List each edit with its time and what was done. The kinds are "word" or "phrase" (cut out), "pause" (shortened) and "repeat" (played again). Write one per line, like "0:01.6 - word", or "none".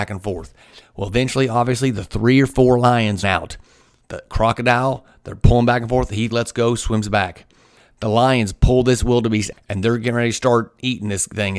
0:03.2 - word
0:06.3 - word
0:09.5 - word